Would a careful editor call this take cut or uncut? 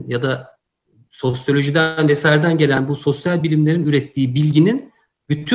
uncut